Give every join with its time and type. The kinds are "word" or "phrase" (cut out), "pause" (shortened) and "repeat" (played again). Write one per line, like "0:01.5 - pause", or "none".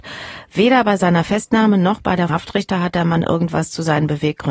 0:02.3 - phrase